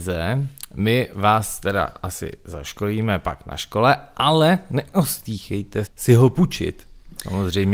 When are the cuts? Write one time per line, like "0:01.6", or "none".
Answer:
0:05.9